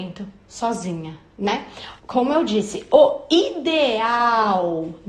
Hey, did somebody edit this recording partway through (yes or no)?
yes